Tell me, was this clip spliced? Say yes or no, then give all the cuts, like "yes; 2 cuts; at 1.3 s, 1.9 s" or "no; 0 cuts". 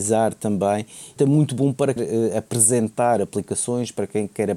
yes; 2 cuts; at 1.2 s, 2.0 s